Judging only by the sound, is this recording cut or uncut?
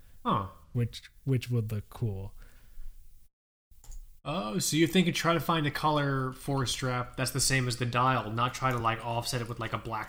uncut